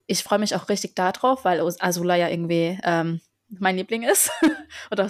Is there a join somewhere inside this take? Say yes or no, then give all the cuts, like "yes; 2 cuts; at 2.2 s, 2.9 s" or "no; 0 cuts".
no; 0 cuts